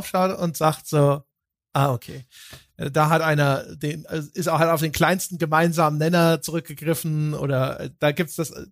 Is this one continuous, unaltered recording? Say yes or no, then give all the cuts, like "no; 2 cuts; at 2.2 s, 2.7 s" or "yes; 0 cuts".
yes; 0 cuts